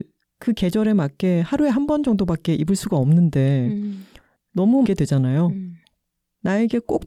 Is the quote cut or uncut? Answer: cut